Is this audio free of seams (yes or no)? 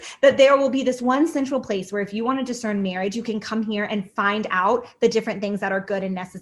yes